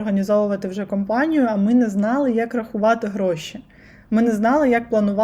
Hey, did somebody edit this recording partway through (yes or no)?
no